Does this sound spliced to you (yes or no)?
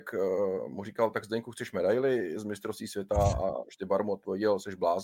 no